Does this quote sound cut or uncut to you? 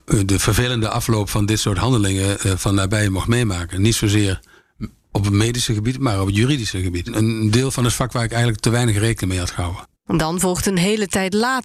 cut